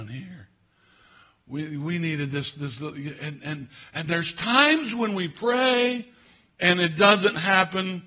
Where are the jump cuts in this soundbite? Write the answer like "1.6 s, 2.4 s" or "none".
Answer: none

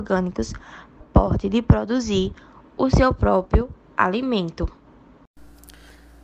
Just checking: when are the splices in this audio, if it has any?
1.0 s

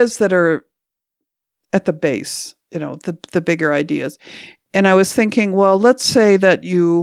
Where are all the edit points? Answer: none

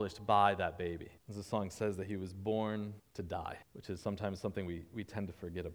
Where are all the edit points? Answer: 1.2 s, 3.0 s, 3.6 s

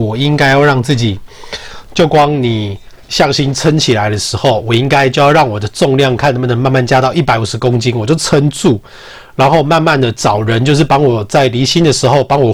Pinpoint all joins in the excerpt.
3.0 s

